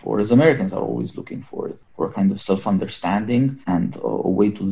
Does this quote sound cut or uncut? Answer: uncut